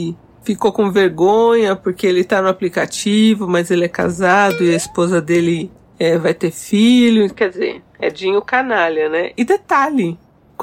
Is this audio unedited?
yes; 0 cuts

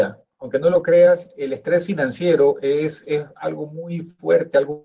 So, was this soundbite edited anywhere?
no; 0 cuts

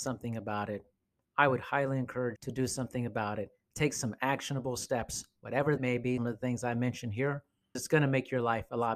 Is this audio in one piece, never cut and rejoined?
no; 4 cuts; at 2.4 s, 5.8 s, 6.2 s, 7.8 s

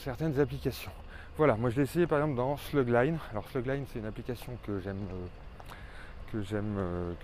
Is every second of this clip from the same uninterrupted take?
yes; 0 cuts

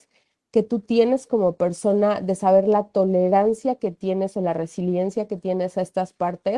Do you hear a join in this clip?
no; 0 cuts

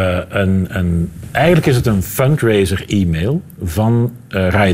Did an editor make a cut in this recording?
no; 0 cuts

